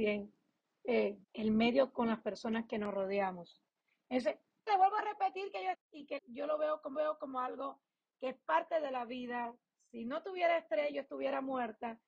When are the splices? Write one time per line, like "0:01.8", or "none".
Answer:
0:01.2
0:04.7
0:05.7
0:06.2
0:06.9